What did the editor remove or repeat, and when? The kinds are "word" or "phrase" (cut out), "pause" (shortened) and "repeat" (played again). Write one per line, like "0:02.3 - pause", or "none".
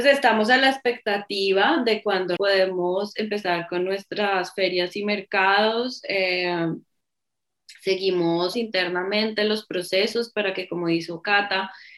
0:02.4 - word
0:08.5 - word